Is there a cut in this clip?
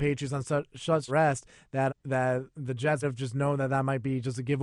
yes; 3 cuts; at 1.1 s, 1.9 s, 3.0 s

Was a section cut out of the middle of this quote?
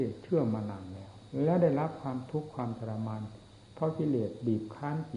yes; 1 cut; at 3.6 s

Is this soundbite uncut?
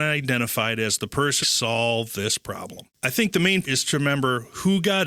no; 3 cuts; at 1.4 s, 2.9 s, 3.6 s

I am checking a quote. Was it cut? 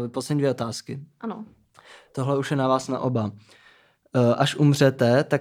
no; 0 cuts

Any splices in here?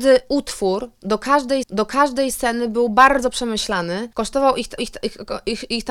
yes; 3 cuts; at 1.6 s, 4.1 s, 4.8 s

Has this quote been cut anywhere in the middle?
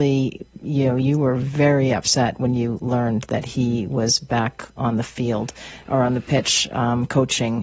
no; 0 cuts

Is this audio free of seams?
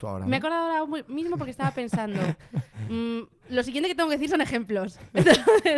yes; 0 cuts

